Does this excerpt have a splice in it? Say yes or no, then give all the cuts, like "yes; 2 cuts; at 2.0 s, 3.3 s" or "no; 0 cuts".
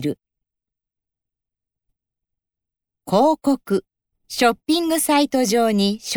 yes; 1 cut; at 4.1 s